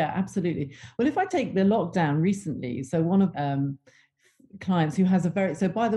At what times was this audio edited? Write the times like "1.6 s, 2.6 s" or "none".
3.3 s